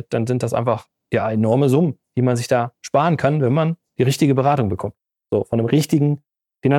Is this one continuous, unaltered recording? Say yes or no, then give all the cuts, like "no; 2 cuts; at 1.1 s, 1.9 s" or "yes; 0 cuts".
yes; 0 cuts